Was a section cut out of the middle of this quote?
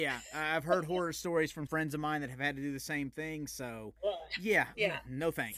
yes; 1 cut; at 1.7 s

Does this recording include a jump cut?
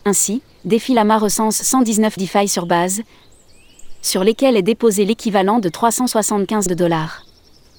yes; 2 cuts; at 2.2 s, 6.7 s

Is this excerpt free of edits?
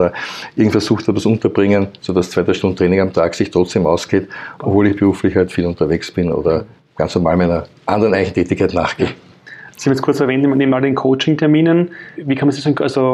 no; 2 cuts; at 6.8 s, 12.1 s

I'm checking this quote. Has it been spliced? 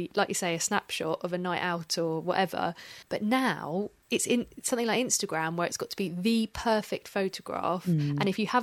yes; 2 cuts; at 3.0 s, 4.0 s

